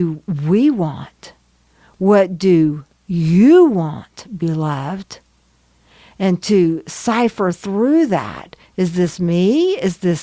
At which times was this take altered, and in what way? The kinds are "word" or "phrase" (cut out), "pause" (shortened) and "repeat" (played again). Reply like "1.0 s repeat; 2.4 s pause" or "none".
none